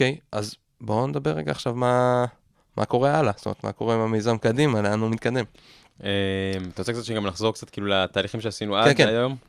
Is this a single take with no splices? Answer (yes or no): yes